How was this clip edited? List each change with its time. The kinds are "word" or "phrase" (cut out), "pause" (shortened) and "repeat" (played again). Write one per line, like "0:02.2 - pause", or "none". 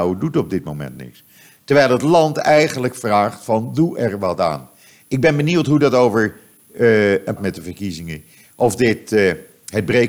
0:07.4 - phrase